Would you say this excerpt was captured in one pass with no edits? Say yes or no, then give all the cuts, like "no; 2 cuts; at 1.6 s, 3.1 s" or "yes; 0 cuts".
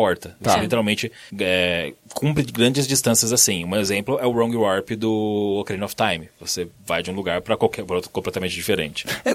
no; 1 cut; at 1.3 s